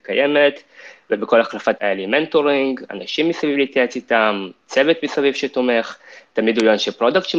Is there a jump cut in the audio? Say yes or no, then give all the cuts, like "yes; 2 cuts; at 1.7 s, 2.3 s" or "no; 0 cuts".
yes; 1 cut; at 1.8 s